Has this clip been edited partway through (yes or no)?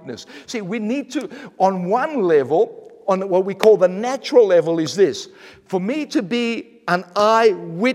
no